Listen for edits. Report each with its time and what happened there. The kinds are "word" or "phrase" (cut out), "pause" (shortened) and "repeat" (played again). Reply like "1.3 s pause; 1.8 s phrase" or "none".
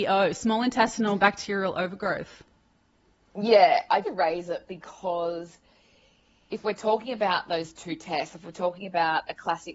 4.0 s phrase